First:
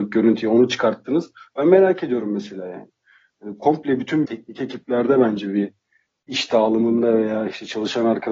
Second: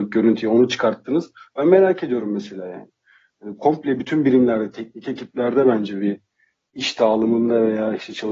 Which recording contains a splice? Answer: first; 1 cut; at 4.2 s

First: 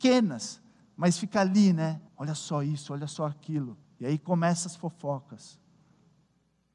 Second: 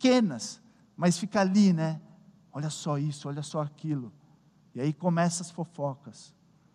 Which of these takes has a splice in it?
first; 2 cuts; at 2.1 s, 3.8 s

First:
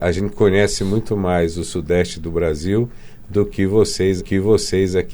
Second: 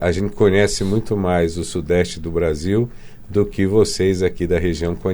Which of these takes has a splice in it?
first; 1 cut; at 4.2 s

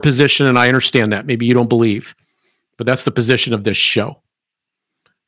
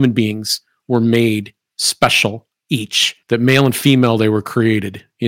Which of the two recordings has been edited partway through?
second; 1 cut; at 3.2 s

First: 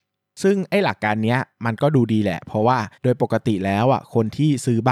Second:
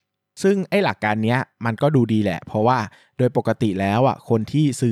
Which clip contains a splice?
first; 1 cut; at 3.0 s

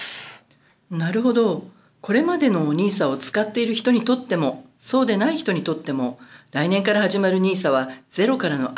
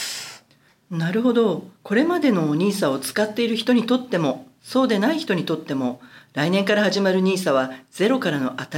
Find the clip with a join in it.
second; 1 cut; at 1.7 s

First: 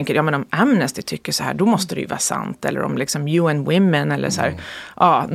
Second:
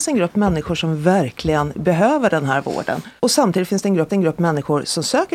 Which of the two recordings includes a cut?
second; 2 cuts; at 3.2 s, 4.1 s

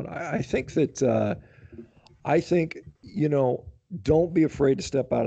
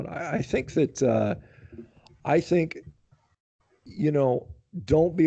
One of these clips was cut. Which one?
first; 1 cut; at 3.0 s

